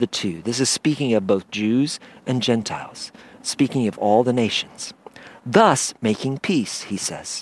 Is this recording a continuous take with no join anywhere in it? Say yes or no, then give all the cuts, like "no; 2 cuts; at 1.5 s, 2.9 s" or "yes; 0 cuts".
yes; 0 cuts